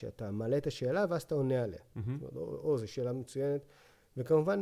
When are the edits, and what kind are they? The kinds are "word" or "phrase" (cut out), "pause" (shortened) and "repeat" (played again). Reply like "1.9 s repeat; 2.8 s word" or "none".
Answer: none